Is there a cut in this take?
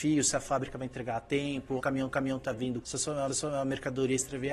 yes; 4 cuts; at 1.8 s, 2.1 s, 2.8 s, 3.3 s

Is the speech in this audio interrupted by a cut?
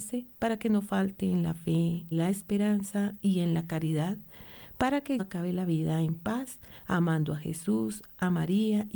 yes; 2 cuts; at 2.1 s, 5.2 s

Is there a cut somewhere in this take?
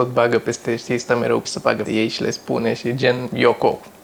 yes; 2 cuts; at 1.4 s, 1.8 s

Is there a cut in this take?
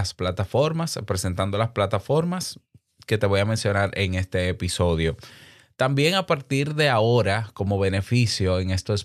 no; 0 cuts

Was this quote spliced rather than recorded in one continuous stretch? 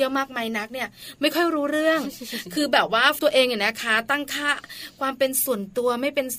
yes; 1 cut; at 3.2 s

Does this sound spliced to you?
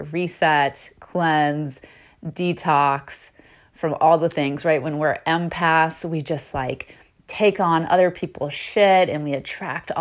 no; 0 cuts

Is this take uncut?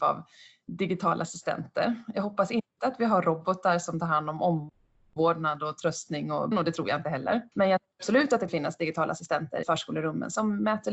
no; 4 cuts; at 6.5 s, 7.5 s, 8.5 s, 9.6 s

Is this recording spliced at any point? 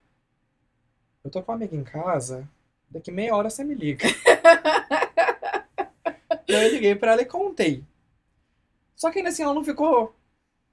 no; 0 cuts

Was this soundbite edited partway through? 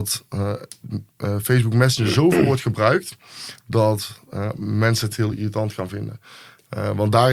no; 0 cuts

